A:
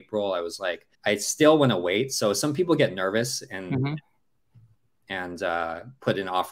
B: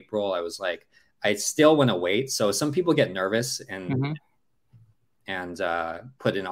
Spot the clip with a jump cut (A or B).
A